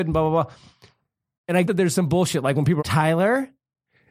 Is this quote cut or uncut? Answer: cut